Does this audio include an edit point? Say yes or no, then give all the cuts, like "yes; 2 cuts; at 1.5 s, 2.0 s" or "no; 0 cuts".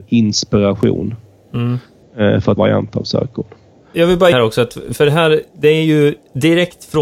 yes; 2 cuts; at 2.6 s, 4.3 s